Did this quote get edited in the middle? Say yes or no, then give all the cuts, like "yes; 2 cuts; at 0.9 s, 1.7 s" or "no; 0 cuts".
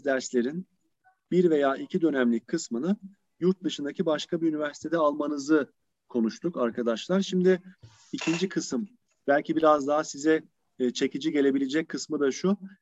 no; 0 cuts